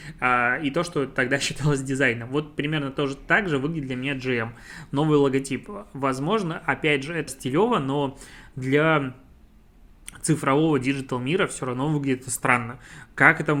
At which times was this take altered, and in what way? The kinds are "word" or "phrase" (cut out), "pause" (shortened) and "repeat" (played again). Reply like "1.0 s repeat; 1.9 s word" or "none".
7.3 s word